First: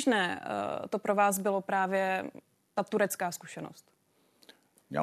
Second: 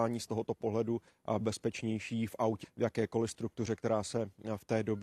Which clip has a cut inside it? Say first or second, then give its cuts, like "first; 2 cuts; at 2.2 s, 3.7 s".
second; 2 cuts; at 1.4 s, 2.6 s